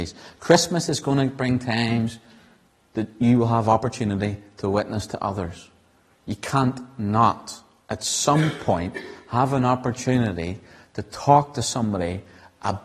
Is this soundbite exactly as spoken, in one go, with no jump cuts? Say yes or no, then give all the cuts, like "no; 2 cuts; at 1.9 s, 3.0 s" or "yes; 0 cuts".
yes; 0 cuts